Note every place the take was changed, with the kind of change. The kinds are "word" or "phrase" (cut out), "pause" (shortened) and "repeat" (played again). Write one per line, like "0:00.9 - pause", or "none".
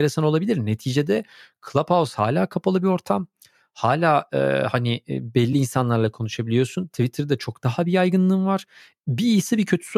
none

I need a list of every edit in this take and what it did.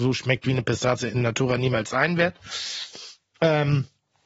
none

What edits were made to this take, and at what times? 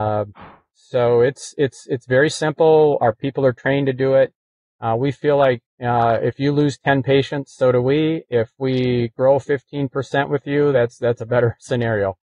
none

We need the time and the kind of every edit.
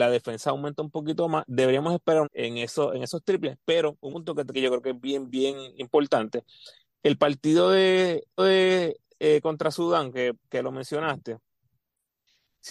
0:02.2 - phrase
0:04.1 - word
0:04.5 - phrase
0:08.4 - repeat

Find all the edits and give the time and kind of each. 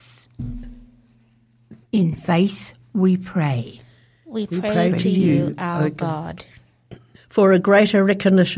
0:01.8 - pause
0:07.1 - pause

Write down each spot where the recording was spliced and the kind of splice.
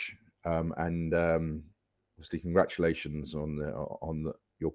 none

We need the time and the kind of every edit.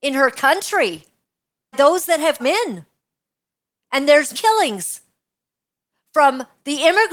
0:01.7 - word
0:02.4 - word
0:04.3 - word

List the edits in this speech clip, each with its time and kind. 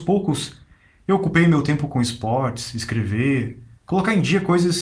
none

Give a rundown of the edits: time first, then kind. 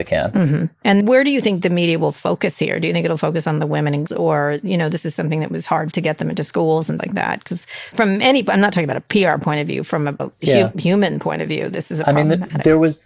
0:01.0 - word
0:04.1 - word
0:05.9 - word
0:07.0 - word
0:07.9 - word
0:10.2 - word

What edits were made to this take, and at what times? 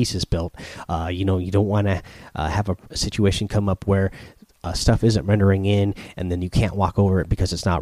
none

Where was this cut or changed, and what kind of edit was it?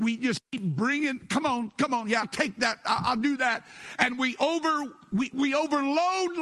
0:02.2 - word

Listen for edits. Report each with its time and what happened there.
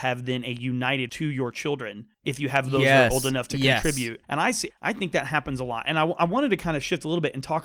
0:01.1 - word
0:02.1 - pause
0:04.2 - pause
0:04.7 - word

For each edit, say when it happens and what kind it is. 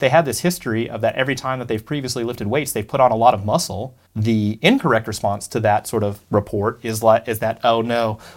0:04.1 - pause
0:06.2 - pause

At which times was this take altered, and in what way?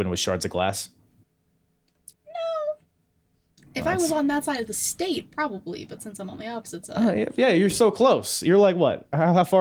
0:02.1 - pause

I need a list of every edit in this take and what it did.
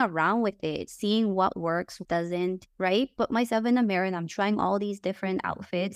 0:02.0 - word

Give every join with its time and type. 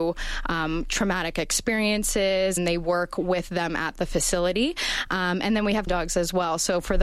0:02.6 - phrase
0:05.9 - word

